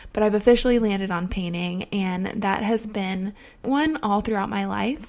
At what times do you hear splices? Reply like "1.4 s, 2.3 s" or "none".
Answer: 3.6 s